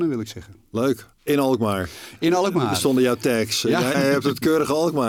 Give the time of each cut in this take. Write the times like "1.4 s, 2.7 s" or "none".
1.1 s, 3.9 s